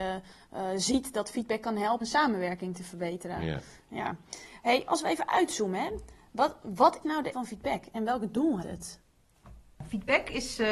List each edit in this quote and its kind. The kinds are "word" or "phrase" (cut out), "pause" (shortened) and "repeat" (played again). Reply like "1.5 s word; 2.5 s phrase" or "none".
2.0 s word; 4.9 s word; 7.0 s word; 7.3 s word; 8.6 s word